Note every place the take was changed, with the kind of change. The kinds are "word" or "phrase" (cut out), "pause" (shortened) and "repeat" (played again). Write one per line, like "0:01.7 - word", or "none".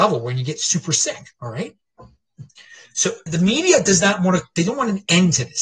0:03.3 - word